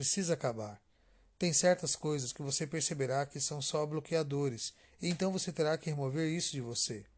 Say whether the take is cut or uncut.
uncut